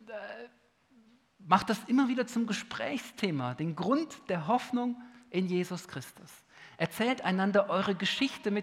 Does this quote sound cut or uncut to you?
uncut